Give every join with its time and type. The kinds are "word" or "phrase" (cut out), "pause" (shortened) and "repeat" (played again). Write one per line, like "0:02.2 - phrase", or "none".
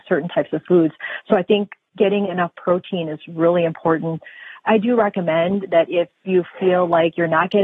0:06.1 - pause